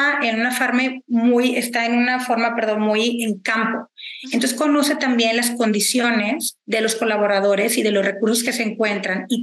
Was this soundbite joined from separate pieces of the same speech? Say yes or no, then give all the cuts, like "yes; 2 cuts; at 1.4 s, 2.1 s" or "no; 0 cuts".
yes; 1 cut; at 6.6 s